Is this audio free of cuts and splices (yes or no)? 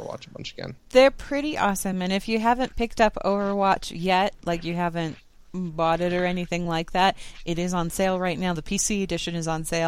yes